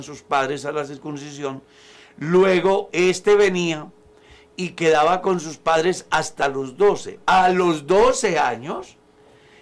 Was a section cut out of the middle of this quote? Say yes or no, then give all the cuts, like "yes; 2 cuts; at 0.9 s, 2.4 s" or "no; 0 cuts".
no; 0 cuts